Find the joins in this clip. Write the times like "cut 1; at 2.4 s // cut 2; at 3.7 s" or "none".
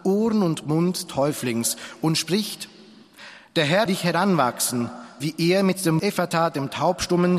cut 1; at 1.1 s // cut 2; at 3.9 s // cut 3; at 5.2 s // cut 4; at 6.0 s